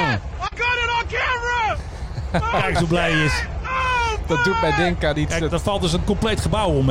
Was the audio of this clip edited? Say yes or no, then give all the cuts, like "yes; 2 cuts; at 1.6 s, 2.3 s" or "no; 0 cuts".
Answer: no; 0 cuts